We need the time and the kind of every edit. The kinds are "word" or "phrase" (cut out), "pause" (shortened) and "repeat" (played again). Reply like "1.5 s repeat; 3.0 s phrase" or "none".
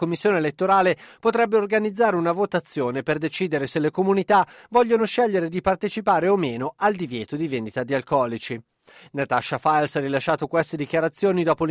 none